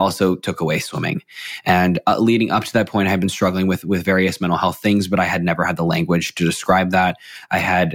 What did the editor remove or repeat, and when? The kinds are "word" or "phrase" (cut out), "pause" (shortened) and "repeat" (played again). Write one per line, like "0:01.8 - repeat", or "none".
none